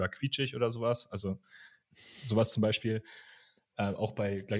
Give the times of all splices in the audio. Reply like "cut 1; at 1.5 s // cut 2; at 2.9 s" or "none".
none